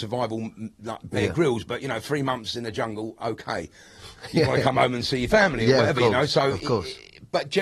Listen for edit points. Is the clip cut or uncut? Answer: uncut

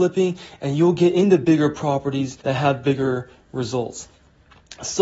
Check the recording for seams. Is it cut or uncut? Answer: cut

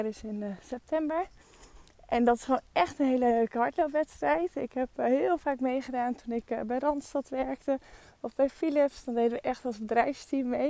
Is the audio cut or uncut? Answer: uncut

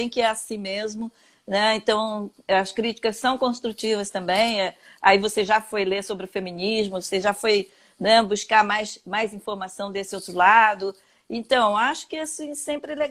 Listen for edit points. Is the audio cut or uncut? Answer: uncut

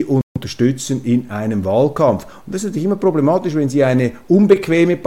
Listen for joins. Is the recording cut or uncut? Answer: uncut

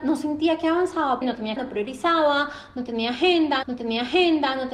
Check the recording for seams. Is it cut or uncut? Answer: cut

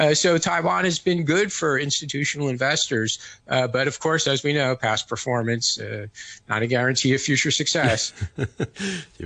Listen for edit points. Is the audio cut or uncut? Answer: uncut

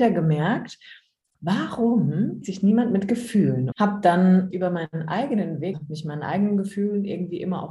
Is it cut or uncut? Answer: cut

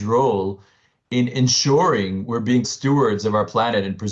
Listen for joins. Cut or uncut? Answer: cut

